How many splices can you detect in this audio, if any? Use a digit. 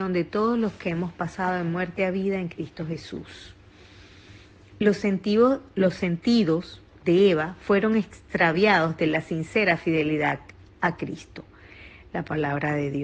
0